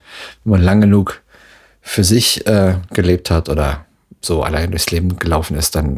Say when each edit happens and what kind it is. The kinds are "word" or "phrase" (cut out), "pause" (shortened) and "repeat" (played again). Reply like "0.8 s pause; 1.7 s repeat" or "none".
none